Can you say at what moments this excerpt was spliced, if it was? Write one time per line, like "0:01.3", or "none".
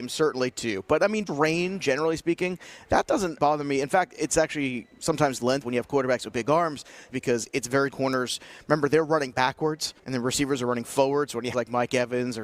0:01.3
0:03.4
0:05.6
0:07.1
0:07.9
0:10.0
0:11.5